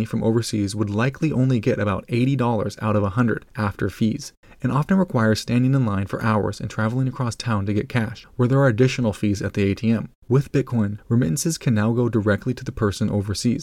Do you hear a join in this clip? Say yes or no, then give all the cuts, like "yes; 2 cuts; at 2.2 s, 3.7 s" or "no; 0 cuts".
no; 0 cuts